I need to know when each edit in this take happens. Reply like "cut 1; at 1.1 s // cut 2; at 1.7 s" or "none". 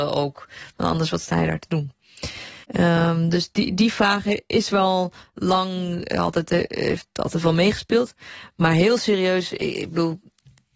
cut 1; at 2.6 s